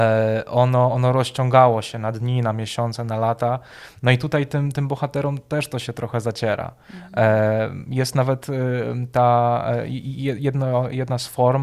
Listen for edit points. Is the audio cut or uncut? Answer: uncut